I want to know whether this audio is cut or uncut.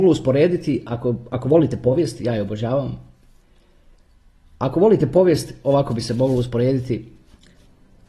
uncut